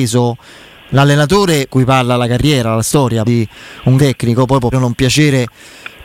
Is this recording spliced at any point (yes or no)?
yes